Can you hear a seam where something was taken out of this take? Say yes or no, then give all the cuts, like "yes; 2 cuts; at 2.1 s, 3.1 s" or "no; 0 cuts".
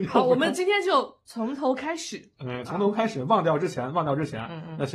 yes; 1 cut; at 2.6 s